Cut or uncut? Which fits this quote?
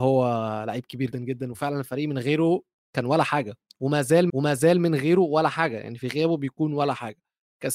cut